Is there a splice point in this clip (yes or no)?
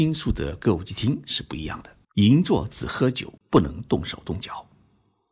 yes